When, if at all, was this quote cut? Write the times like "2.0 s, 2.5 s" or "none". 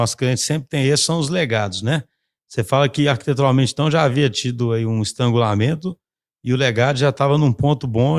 none